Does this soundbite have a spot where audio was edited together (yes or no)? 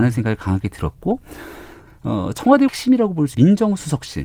yes